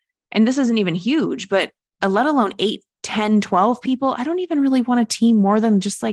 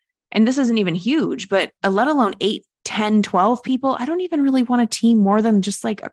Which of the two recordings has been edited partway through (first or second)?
second